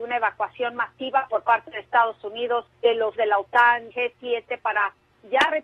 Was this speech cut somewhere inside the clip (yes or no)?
yes